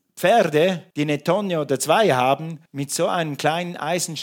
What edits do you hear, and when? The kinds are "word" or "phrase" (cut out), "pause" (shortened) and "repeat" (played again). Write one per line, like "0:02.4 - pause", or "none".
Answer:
0:00.9 - pause
0:02.7 - pause